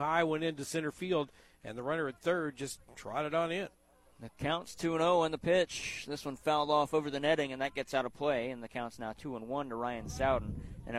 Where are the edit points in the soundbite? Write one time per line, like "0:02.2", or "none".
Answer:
none